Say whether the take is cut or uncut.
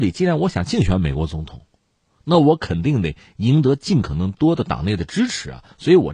uncut